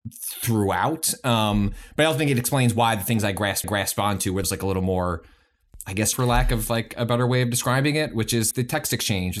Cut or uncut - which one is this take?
cut